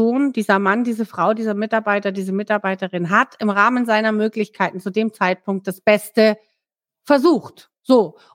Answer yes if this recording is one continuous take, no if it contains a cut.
yes